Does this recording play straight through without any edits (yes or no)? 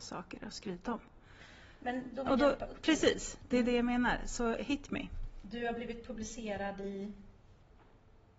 no